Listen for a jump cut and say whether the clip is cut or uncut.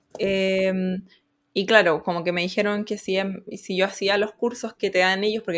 uncut